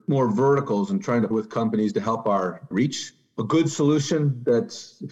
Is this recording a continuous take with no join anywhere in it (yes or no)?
no